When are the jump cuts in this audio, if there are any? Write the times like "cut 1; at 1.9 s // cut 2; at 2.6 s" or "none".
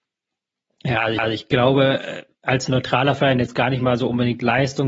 cut 1; at 1.2 s